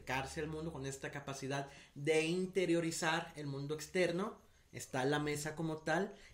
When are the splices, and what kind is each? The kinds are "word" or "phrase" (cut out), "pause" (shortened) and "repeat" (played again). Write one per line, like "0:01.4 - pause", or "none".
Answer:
none